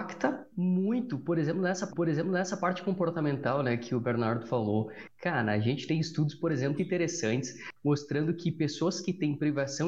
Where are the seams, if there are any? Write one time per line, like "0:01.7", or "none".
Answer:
0:01.9
0:06.8